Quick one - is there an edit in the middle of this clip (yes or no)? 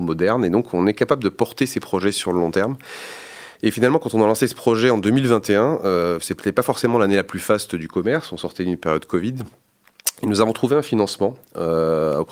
no